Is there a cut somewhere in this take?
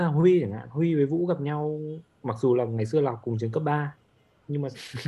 no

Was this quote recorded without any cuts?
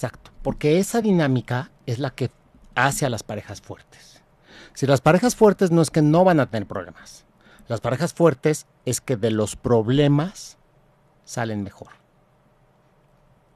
yes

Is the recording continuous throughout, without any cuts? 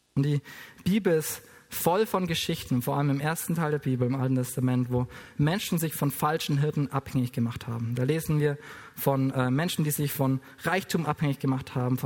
yes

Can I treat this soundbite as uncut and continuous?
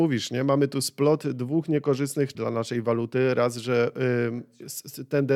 no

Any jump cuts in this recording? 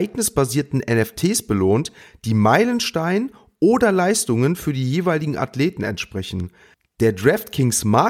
no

